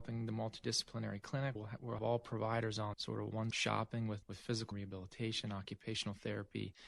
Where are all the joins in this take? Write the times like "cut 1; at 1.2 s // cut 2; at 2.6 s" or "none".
cut 1; at 1.6 s // cut 2; at 2.0 s // cut 3; at 2.9 s // cut 4; at 3.5 s // cut 5; at 4.2 s // cut 6; at 4.7 s